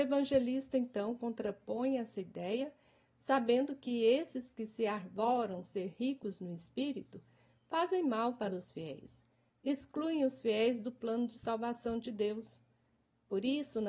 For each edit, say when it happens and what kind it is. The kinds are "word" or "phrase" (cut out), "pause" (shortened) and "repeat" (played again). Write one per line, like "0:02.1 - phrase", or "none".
none